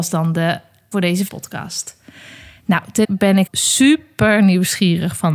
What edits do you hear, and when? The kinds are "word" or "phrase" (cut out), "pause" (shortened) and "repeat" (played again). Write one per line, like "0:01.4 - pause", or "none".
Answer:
0:00.9 - word
0:01.3 - word
0:03.0 - word
0:03.5 - word